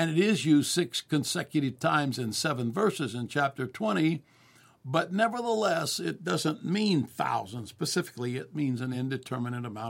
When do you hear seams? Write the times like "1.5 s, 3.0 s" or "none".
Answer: none